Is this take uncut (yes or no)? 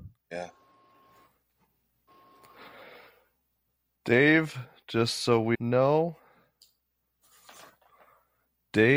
no